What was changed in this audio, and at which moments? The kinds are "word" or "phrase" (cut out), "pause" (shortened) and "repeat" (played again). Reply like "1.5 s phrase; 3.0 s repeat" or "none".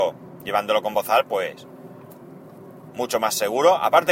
none